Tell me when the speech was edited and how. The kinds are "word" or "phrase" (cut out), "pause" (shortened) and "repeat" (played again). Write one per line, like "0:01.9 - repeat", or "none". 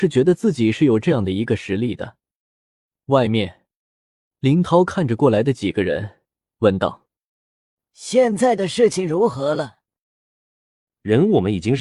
none